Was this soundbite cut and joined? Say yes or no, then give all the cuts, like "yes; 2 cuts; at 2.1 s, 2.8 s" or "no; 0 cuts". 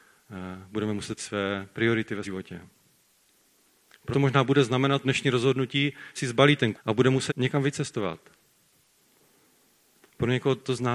yes; 7 cuts; at 1.2 s, 2.2 s, 4.1 s, 5.0 s, 6.2 s, 6.8 s, 7.3 s